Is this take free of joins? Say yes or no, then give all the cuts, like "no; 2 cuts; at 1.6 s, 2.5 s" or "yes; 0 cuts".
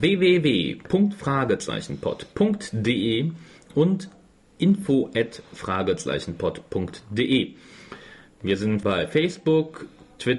no; 1 cut; at 8.8 s